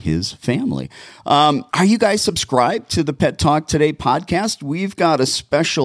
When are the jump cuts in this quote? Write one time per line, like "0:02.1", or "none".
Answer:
0:01.7